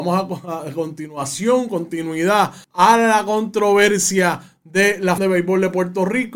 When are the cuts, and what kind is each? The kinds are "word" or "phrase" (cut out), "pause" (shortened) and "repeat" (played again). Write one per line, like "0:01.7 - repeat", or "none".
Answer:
0:02.6 - pause
0:05.2 - word